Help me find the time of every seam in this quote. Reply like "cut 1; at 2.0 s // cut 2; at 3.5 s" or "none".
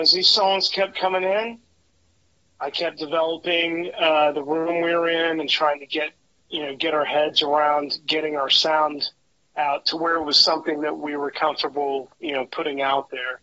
none